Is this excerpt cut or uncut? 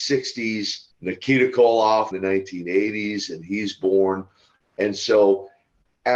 cut